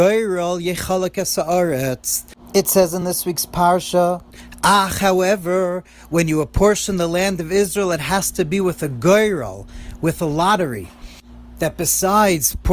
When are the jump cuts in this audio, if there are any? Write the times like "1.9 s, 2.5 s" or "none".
none